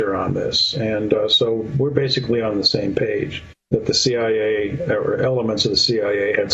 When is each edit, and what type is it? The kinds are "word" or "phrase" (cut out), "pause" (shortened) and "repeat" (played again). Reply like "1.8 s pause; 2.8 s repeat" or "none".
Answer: 3.6 s pause